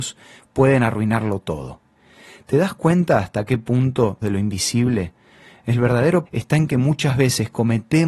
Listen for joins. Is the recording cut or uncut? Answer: cut